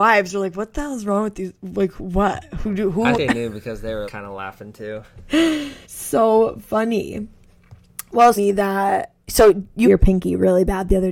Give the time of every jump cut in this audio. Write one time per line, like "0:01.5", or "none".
0:03.1
0:04.1
0:05.8
0:08.4
0:09.2
0:09.8